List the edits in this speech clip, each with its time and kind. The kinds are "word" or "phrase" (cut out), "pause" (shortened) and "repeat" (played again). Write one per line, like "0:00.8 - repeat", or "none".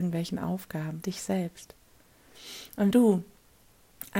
0:01.0 - word
0:02.9 - word